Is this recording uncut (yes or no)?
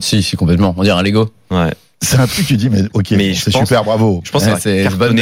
yes